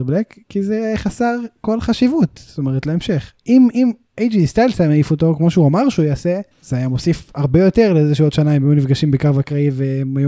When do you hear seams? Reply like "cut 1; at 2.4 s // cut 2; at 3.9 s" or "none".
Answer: cut 1; at 3.4 s // cut 2; at 6.5 s